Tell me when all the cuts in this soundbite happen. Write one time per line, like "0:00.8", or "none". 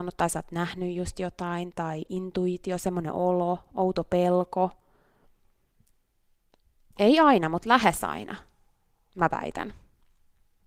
none